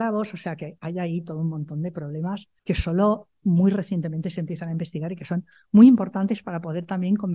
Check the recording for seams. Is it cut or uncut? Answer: cut